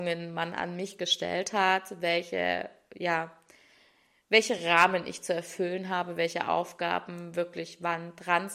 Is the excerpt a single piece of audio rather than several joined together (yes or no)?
yes